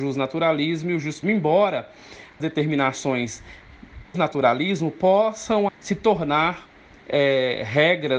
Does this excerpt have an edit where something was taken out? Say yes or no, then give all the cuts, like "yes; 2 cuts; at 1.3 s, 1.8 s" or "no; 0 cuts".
yes; 4 cuts; at 1.2 s, 2.4 s, 4.1 s, 5.7 s